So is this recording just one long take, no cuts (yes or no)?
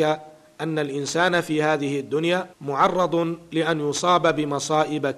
no